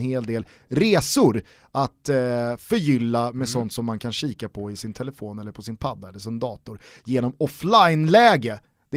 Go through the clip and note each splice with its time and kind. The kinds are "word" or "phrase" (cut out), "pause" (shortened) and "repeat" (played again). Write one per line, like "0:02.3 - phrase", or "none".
none